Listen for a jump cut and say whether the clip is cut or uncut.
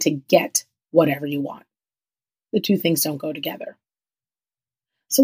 uncut